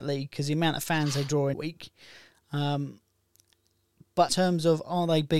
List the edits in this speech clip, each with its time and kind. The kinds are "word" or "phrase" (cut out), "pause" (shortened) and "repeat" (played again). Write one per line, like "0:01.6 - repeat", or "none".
0:01.5 - word
0:04.3 - word